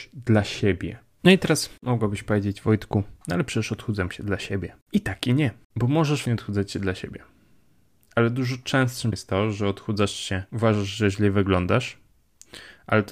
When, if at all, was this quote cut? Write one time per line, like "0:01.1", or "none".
0:06.3
0:09.1
0:10.5